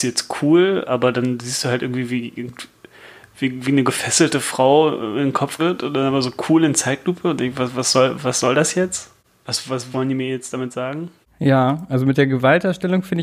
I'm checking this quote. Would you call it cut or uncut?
cut